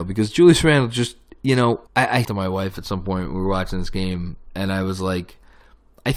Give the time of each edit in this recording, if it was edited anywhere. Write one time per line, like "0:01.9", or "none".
0:01.9
0:02.2